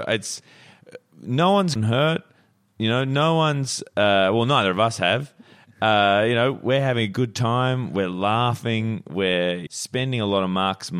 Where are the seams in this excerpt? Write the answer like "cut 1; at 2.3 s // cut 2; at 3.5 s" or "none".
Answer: cut 1; at 1.8 s // cut 2; at 9.7 s